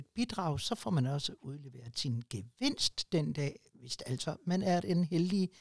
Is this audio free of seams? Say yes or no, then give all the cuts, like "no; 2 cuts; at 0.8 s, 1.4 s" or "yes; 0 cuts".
yes; 0 cuts